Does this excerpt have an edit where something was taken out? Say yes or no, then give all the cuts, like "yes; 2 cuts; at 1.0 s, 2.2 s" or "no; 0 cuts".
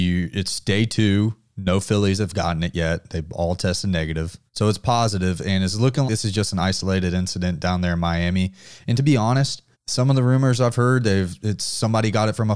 yes; 3 cuts; at 4.5 s, 6.1 s, 9.7 s